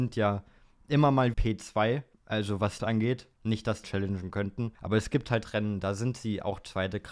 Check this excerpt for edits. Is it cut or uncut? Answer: cut